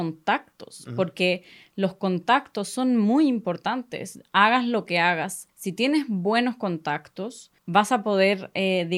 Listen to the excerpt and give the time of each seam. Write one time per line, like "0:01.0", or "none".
0:05.5
0:07.6